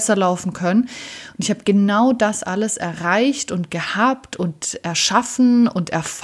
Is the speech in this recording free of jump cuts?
yes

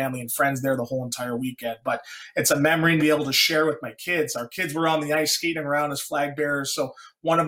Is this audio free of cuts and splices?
no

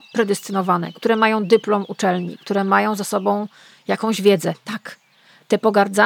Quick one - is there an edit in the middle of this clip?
no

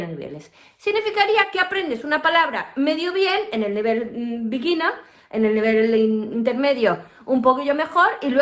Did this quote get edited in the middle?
no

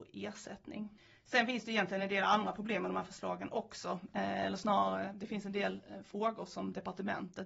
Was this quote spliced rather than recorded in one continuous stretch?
no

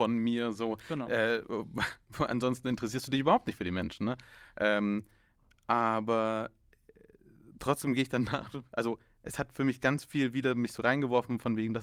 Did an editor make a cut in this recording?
no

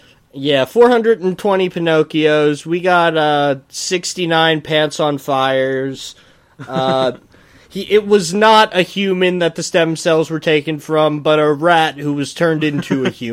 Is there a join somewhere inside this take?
no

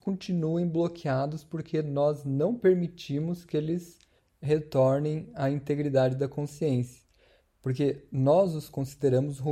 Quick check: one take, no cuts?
yes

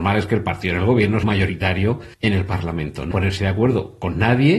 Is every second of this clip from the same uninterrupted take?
no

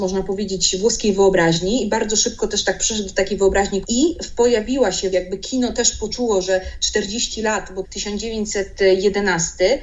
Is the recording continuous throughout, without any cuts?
no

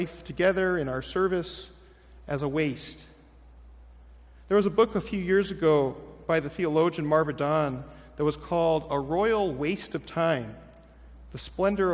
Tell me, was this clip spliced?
no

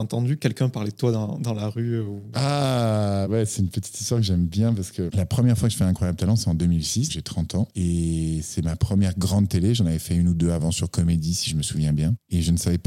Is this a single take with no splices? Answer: no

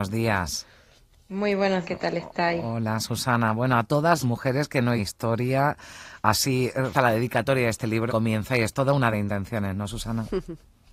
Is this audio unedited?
no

